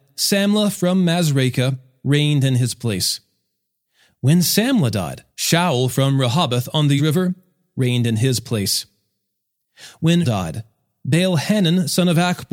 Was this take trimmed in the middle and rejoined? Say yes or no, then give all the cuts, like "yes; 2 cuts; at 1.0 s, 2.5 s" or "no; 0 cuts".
yes; 3 cuts; at 5.3 s, 7.0 s, 10.2 s